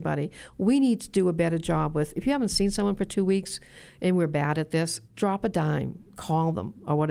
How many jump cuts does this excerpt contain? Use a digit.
1